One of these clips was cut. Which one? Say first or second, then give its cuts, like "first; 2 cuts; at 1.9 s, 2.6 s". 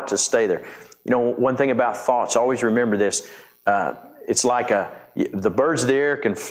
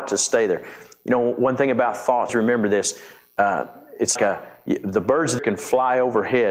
second; 3 cuts; at 2.3 s, 4.2 s, 5.4 s